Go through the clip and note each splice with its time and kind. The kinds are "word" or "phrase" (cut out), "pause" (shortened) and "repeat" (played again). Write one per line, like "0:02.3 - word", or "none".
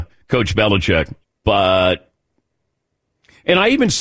0:01.2 - pause